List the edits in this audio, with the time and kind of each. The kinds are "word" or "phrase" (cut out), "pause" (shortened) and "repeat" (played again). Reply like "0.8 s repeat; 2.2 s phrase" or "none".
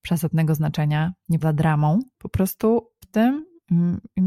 1.4 s word; 2.1 s pause; 3.0 s word